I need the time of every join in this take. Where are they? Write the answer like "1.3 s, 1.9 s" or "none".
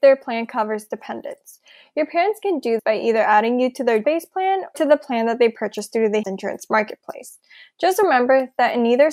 2.8 s, 4.0 s, 4.7 s, 6.2 s